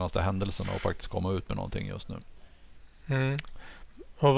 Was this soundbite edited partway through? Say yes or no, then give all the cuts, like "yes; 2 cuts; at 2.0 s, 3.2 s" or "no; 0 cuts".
no; 0 cuts